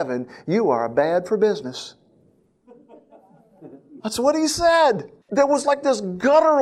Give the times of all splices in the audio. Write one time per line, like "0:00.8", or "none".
0:04.0
0:05.2